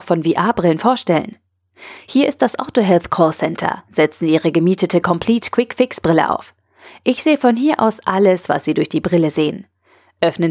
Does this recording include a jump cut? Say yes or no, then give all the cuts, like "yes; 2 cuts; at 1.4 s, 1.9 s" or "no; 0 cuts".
no; 0 cuts